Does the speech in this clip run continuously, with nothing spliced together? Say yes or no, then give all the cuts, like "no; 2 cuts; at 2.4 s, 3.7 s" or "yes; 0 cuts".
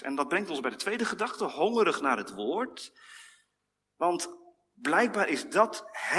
yes; 0 cuts